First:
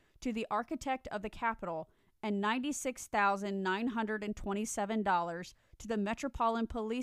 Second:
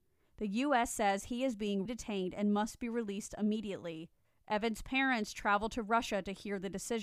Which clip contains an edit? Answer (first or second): second